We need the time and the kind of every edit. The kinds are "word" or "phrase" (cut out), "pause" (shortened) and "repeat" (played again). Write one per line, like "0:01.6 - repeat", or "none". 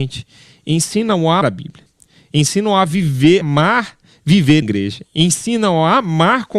0:01.4 - word
0:03.4 - word
0:04.6 - word